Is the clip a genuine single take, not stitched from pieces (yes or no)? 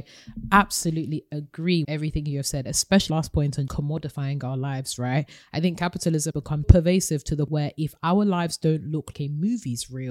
no